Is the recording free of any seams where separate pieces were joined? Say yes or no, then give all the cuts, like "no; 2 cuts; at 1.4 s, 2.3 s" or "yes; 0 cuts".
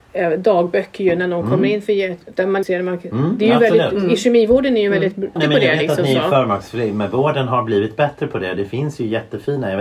no; 2 cuts; at 2.6 s, 5.4 s